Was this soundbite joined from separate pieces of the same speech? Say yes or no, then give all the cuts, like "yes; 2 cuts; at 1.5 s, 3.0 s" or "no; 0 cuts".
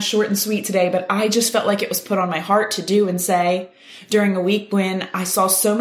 no; 0 cuts